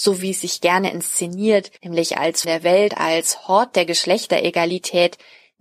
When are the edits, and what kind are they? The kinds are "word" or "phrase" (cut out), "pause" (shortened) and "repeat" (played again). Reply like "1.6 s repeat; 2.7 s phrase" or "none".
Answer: 1.8 s pause; 2.4 s word; 2.9 s word